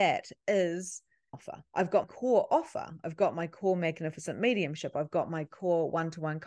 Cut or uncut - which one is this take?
cut